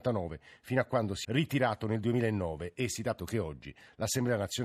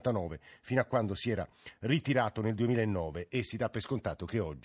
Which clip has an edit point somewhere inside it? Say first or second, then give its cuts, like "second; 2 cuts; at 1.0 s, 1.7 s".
first; 2 cuts; at 1.2 s, 3.2 s